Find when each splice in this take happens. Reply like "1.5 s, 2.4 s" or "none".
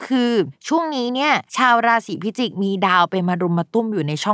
1.5 s